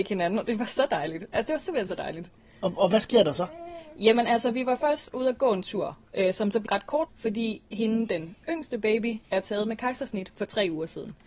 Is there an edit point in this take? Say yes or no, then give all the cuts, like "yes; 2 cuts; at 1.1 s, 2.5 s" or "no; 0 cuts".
yes; 4 cuts; at 6.7 s, 7.1 s, 7.7 s, 9.2 s